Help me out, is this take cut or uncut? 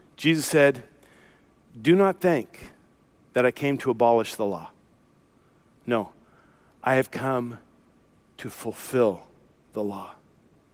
uncut